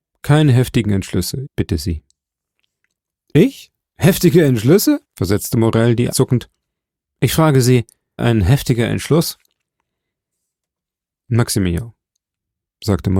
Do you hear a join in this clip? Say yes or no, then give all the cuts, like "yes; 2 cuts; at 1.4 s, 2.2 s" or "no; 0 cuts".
yes; 4 cuts; at 1.5 s, 5.0 s, 6.1 s, 8.2 s